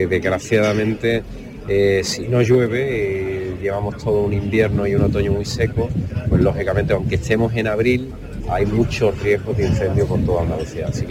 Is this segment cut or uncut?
uncut